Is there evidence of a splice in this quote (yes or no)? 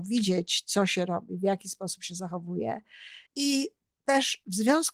yes